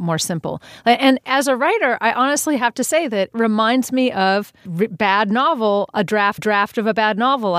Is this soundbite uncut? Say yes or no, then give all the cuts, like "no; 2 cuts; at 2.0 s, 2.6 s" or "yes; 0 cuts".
no; 3 cuts; at 3.3 s, 4.7 s, 6.4 s